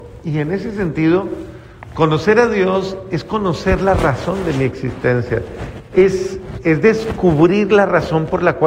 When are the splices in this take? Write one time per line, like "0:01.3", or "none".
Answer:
none

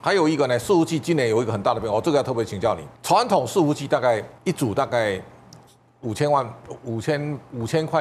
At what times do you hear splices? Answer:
0:02.9
0:04.4
0:05.7

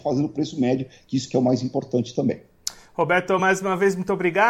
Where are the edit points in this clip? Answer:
none

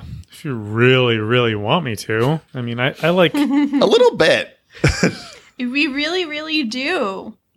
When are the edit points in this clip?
0:02.5

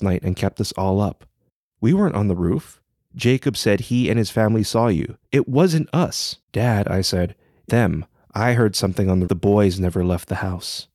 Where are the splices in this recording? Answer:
0:05.2
0:06.4
0:07.7
0:09.3

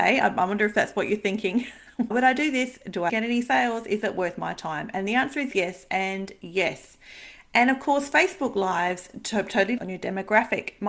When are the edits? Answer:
0:02.1
0:03.1
0:05.5
0:09.8

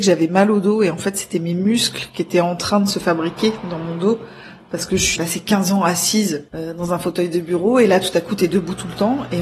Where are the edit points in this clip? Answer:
0:05.2
0:06.5

